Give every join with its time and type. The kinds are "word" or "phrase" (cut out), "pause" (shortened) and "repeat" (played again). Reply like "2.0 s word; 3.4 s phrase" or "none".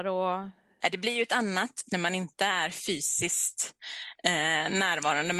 1.9 s word

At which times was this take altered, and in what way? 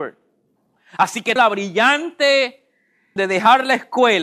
1.4 s word; 3.2 s word

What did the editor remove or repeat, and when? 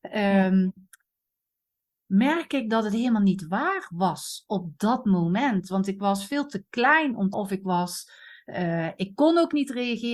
7.3 s phrase

